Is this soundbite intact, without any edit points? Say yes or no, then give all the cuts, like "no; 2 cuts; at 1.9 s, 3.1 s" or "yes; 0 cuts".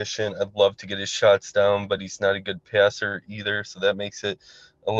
yes; 0 cuts